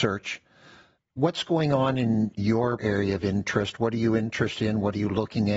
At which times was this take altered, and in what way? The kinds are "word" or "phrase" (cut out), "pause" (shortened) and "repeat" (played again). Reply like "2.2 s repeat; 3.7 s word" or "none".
2.8 s word